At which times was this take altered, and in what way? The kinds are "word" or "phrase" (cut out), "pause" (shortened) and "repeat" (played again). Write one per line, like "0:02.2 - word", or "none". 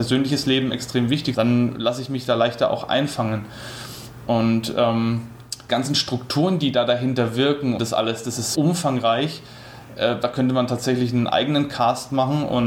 0:01.3 - word
0:05.7 - phrase
0:07.8 - word
0:08.5 - word

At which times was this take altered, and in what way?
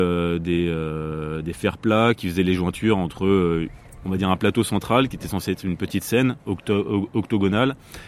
0:06.4 - pause

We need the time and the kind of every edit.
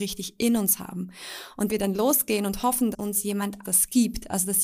0:01.7 - word
0:02.9 - word
0:03.6 - word

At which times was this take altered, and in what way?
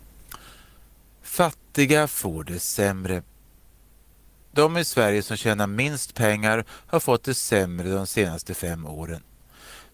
none

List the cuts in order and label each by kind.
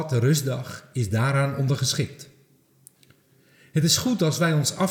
none

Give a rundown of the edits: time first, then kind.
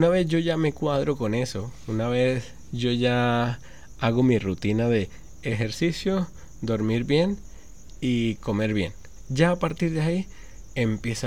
none

